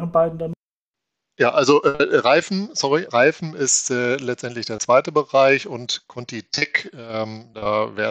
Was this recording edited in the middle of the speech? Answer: yes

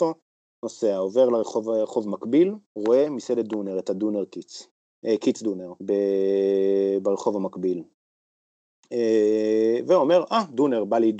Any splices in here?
yes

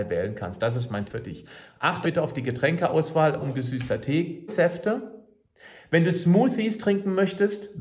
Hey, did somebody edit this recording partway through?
yes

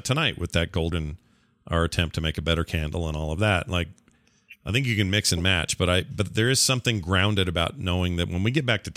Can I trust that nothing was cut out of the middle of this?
no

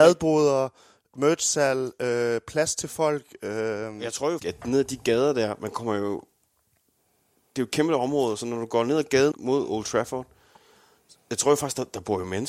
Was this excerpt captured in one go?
no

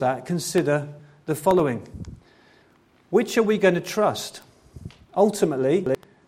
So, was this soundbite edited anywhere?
no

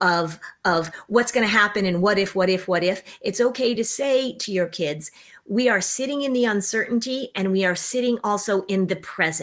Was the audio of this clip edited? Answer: no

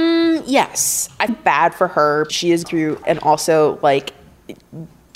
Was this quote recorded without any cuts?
no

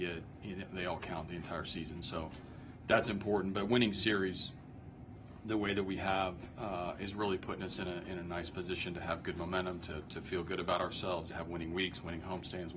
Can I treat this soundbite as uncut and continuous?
yes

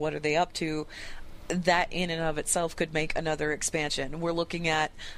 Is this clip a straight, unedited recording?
yes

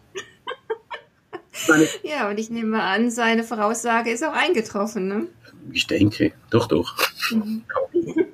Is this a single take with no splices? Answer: yes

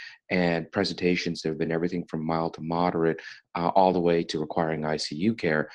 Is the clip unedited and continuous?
yes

